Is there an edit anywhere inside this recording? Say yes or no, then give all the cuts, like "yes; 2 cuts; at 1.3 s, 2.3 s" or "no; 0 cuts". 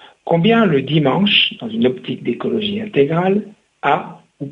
no; 0 cuts